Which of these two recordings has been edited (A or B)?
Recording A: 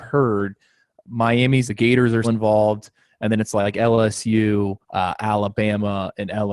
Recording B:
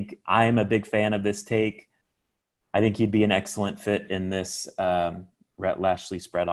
A